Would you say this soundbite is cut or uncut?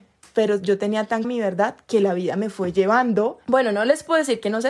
cut